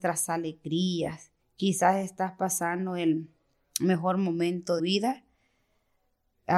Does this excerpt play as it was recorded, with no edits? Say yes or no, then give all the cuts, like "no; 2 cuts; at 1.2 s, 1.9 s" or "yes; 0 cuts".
no; 2 cuts; at 1.4 s, 4.8 s